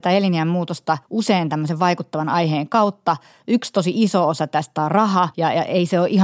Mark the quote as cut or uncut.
uncut